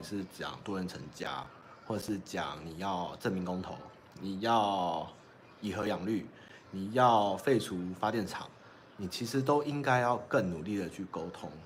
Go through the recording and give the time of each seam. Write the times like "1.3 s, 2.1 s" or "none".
none